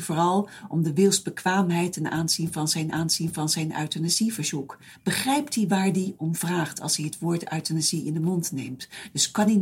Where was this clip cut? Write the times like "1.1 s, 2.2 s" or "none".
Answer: 2.9 s